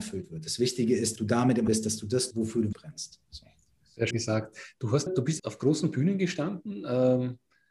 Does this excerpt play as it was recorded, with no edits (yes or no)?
no